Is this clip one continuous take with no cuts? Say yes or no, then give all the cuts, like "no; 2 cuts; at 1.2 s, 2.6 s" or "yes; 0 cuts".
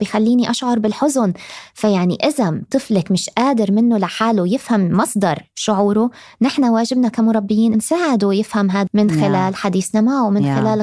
no; 2 cuts; at 7.7 s, 8.9 s